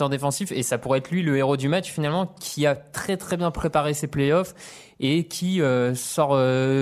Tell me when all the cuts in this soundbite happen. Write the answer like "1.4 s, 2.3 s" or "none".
none